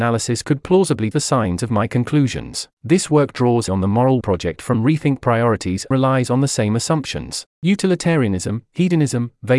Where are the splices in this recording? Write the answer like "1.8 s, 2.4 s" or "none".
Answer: 1.1 s, 2.7 s, 3.7 s, 4.2 s, 5.9 s, 7.5 s